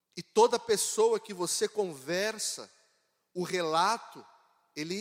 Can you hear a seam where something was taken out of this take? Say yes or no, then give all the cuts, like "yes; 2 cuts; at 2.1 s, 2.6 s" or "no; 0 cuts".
no; 0 cuts